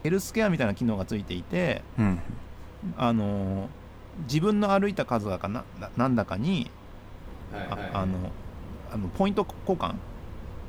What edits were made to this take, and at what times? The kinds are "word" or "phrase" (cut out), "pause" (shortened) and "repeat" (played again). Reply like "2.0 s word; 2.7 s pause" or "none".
2.9 s word; 7.7 s repeat